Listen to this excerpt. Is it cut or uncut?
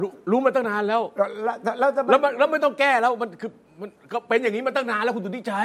uncut